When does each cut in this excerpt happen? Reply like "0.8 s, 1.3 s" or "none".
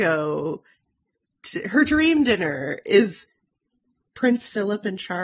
none